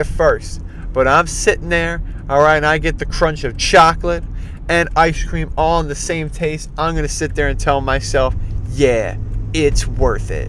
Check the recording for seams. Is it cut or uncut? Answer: uncut